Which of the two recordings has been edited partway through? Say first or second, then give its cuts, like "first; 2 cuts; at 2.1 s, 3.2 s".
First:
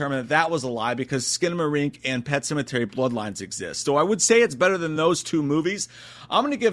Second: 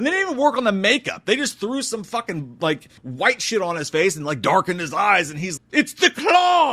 second; 2 cuts; at 3.0 s, 5.6 s